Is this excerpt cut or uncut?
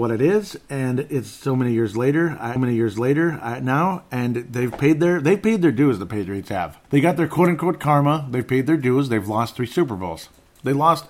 cut